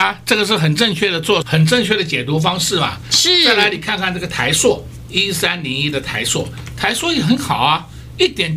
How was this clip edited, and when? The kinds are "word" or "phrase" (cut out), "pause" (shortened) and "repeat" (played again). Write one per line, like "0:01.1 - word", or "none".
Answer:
0:01.4 - word

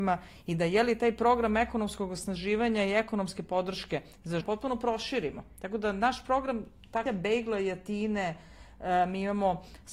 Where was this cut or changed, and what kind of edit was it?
0:04.4 - word
0:07.1 - word

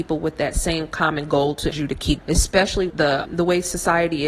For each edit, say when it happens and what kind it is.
0:01.7 - word
0:02.2 - word
0:02.9 - word
0:03.2 - word

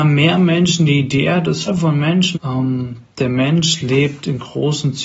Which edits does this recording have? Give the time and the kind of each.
0:01.7 - word
0:02.3 - word
0:03.1 - pause

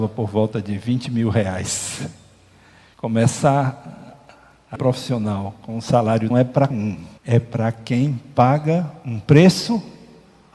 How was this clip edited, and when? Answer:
0:04.8 - word
0:06.3 - phrase
0:06.7 - word
0:07.2 - pause

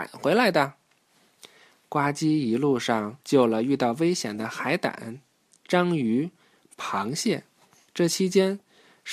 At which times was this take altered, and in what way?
0:03.2 - pause

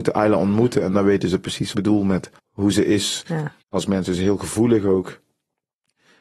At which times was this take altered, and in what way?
0:01.7 - phrase
0:02.4 - pause
0:03.6 - pause

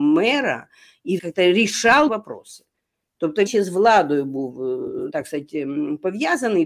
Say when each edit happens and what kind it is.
0:01.2 - word
0:02.1 - word
0:03.5 - word
0:05.1 - word

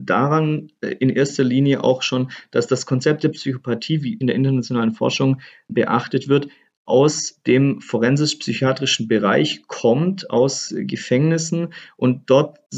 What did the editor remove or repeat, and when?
0:04.2 - phrase

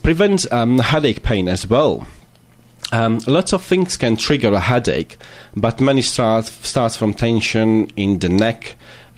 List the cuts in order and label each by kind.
none

